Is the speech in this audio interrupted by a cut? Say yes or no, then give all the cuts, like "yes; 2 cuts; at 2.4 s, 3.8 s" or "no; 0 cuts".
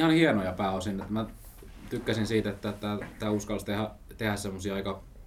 no; 0 cuts